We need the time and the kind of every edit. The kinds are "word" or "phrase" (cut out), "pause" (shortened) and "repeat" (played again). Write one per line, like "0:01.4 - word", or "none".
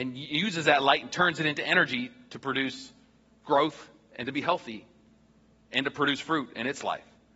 none